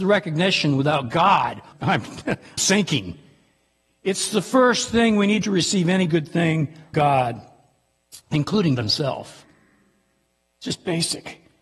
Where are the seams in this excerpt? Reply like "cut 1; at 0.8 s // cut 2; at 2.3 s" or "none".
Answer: cut 1; at 1.7 s // cut 2; at 2.6 s // cut 3; at 5.4 s // cut 4; at 6.1 s // cut 5; at 6.9 s // cut 6; at 8.8 s